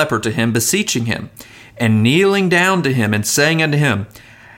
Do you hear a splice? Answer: no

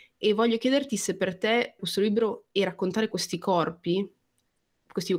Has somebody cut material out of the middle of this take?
yes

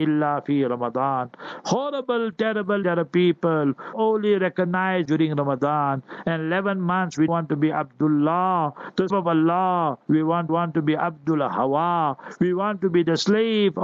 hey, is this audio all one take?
no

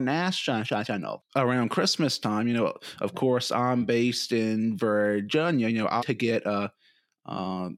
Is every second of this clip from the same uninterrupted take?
no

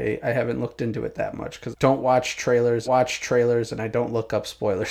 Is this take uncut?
no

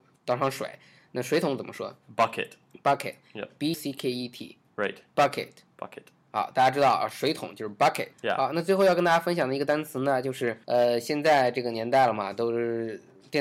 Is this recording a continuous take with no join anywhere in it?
no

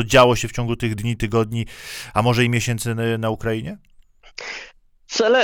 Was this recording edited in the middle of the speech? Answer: no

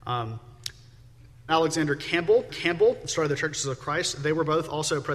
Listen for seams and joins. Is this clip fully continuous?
no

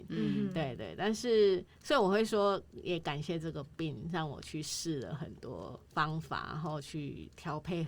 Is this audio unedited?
no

